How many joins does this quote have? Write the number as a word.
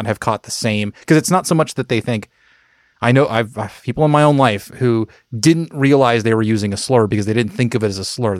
zero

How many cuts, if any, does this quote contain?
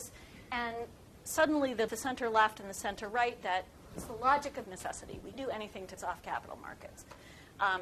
six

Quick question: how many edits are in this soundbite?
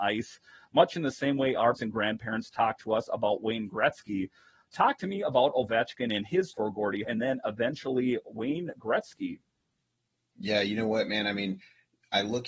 three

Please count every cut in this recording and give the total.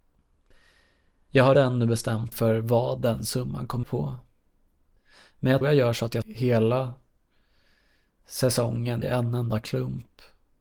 six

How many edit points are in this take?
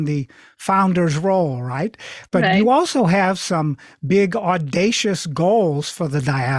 zero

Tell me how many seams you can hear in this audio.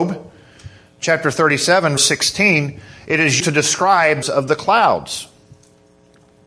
three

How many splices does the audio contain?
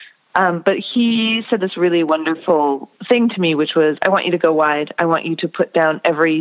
one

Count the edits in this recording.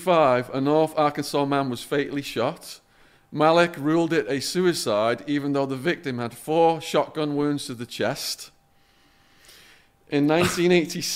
zero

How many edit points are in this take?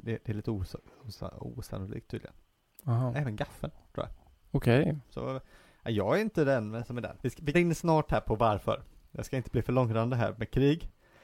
three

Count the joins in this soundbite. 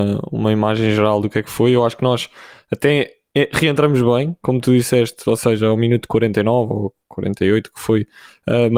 zero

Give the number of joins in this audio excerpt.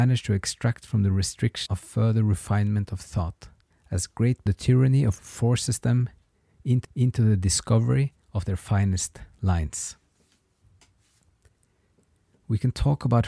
six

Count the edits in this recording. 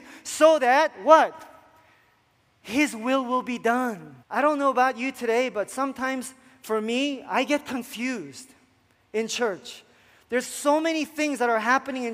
one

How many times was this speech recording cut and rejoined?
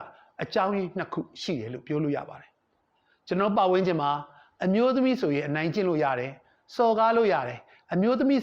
zero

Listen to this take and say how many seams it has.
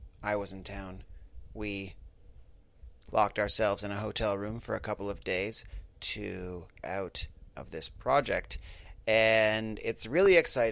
two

